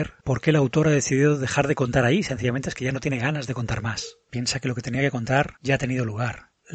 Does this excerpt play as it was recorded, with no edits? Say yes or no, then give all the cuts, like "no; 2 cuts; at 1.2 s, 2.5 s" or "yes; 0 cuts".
yes; 0 cuts